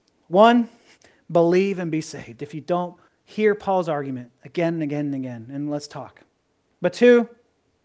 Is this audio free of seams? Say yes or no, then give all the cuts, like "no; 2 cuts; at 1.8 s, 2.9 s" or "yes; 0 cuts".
no; 1 cut; at 3.1 s